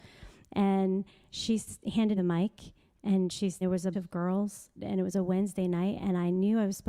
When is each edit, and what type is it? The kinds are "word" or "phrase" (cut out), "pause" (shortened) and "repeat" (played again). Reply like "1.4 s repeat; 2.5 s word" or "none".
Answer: 2.2 s word; 3.6 s word; 3.9 s word; 4.8 s word